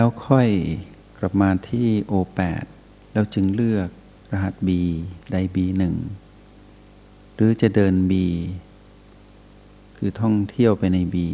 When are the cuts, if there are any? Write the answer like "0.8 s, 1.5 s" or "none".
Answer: 4.2 s